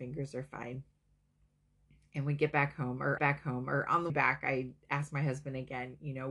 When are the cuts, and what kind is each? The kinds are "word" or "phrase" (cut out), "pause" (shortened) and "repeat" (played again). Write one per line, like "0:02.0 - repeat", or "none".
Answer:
0:03.2 - repeat
0:04.1 - word